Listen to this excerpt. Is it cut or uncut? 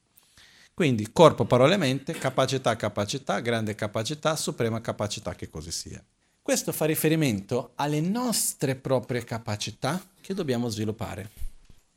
cut